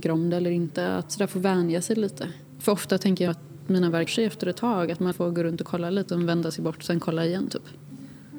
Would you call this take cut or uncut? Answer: cut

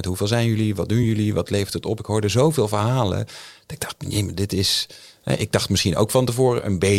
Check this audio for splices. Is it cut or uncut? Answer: uncut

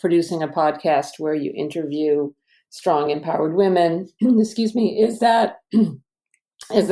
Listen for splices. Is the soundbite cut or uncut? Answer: uncut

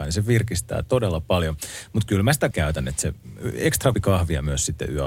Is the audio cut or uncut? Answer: cut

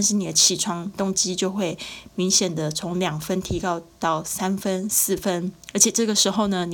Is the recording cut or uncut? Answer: cut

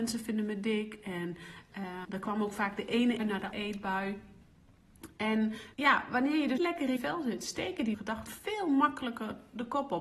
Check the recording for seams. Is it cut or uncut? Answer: cut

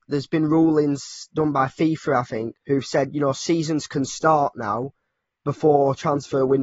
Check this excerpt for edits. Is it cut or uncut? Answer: cut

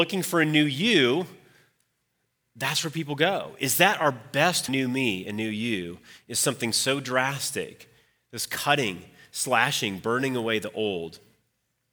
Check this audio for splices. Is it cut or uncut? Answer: cut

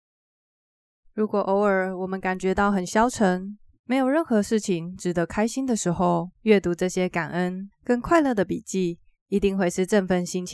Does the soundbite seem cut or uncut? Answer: cut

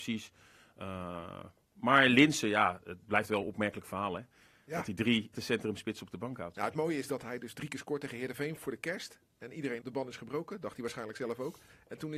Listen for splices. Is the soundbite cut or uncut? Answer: cut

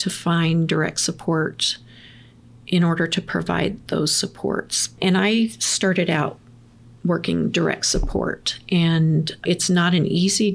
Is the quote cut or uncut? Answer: uncut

